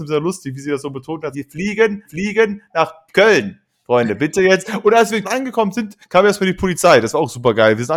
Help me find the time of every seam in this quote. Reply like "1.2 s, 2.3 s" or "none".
1.3 s, 2.0 s, 5.2 s